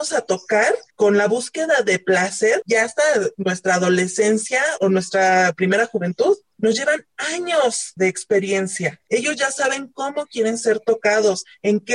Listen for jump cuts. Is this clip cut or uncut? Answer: cut